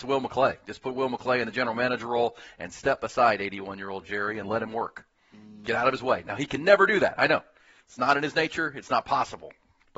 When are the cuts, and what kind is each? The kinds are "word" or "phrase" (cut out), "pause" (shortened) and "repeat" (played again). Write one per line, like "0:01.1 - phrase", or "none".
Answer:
none